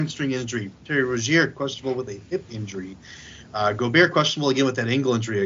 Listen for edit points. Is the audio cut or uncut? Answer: uncut